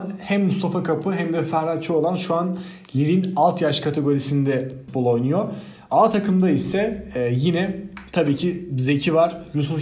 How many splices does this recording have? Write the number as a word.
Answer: zero